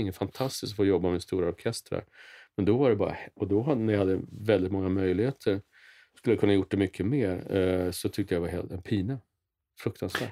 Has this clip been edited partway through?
no; 0 cuts

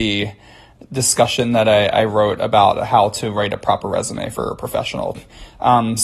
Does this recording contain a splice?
no; 0 cuts

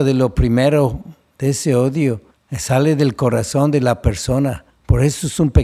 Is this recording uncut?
no; 2 cuts; at 2.3 s, 4.7 s

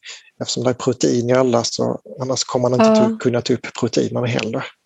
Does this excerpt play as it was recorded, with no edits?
yes; 0 cuts

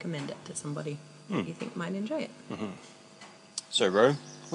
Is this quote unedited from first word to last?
yes; 0 cuts

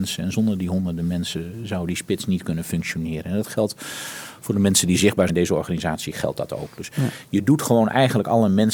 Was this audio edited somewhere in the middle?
yes; 1 cut; at 5.3 s

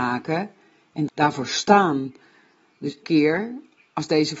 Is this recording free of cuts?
no; 2 cuts; at 1.1 s, 3.0 s

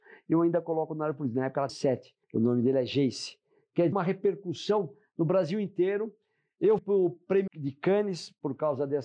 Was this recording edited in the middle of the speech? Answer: yes; 5 cuts; at 1.7 s, 2.2 s, 3.9 s, 6.8 s, 7.5 s

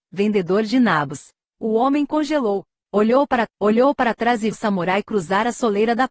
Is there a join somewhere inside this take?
yes; 2 cuts; at 3.5 s, 4.5 s

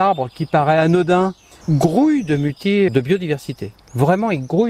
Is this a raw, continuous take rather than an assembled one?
no; 2 cuts; at 1.6 s, 2.9 s

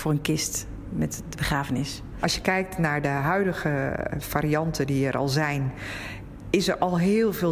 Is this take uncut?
yes; 0 cuts

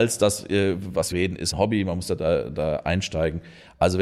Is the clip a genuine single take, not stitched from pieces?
no; 2 cuts; at 1.1 s, 1.5 s

